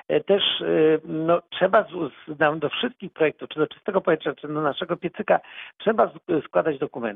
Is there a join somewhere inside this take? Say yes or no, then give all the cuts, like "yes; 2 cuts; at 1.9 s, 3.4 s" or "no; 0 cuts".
no; 0 cuts